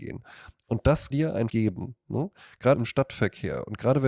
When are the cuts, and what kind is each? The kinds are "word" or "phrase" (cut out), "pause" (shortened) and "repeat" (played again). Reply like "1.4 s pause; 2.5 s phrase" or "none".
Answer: 1.1 s word; 1.5 s word; 2.7 s word